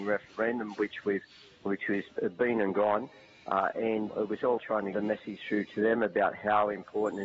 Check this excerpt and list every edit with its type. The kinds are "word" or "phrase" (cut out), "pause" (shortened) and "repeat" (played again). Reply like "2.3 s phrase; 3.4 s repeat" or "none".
4.1 s word; 4.6 s word; 4.9 s word

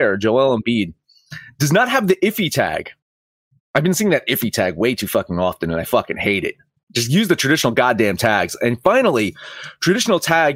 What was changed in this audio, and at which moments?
none

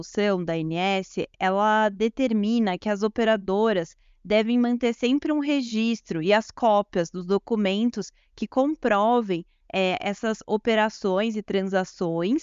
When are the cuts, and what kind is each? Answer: none

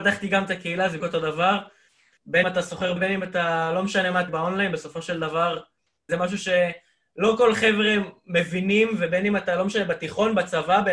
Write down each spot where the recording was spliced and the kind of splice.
1.0 s word; 2.4 s word; 3.0 s word; 4.3 s word; 6.1 s word

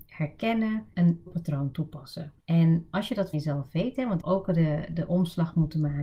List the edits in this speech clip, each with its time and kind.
0.9 s word; 1.3 s word; 2.4 s pause; 3.3 s word; 4.2 s phrase

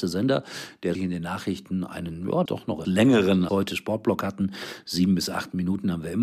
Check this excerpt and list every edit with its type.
0.9 s word; 2.5 s word; 2.8 s word; 3.5 s word

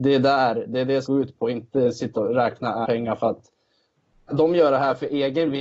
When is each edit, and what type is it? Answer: 1.0 s word; 2.2 s word; 2.8 s word; 4.3 s word

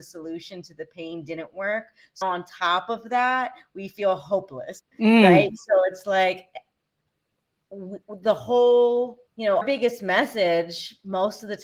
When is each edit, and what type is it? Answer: 2.2 s word; 4.9 s pause; 9.3 s pause; 9.6 s word

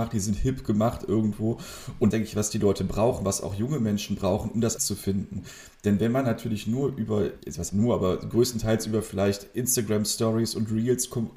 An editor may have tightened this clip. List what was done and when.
2.1 s phrase; 4.8 s word; 7.7 s word

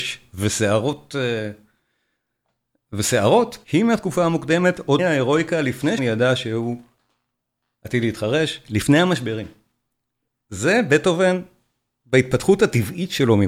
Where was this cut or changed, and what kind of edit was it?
3.6 s pause; 5.0 s word; 6.0 s word

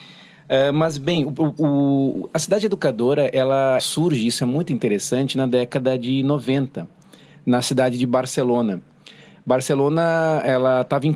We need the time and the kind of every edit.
3.8 s word

